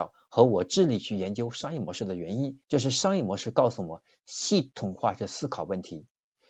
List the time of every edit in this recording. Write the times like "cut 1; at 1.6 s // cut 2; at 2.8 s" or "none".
cut 1; at 2.6 s

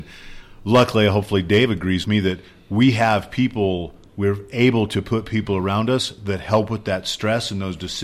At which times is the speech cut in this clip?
cut 1; at 2.0 s

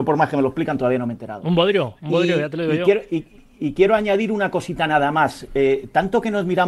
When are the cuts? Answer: none

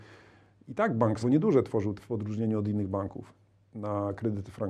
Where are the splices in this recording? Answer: cut 1; at 1.2 s // cut 2; at 2.0 s

